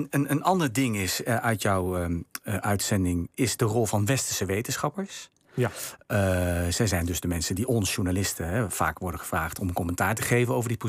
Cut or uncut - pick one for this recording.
uncut